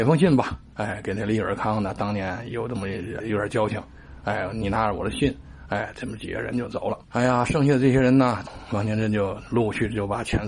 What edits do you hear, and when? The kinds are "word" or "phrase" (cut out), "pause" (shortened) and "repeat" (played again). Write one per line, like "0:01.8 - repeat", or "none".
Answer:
0:03.2 - word
0:07.0 - pause